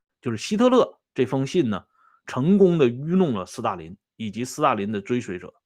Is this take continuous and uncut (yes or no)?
yes